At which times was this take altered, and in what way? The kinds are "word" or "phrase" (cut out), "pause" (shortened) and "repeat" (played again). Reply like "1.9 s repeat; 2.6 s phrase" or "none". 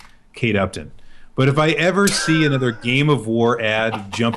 none